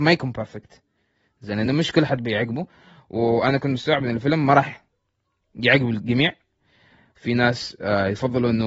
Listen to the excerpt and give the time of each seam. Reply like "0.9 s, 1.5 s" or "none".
none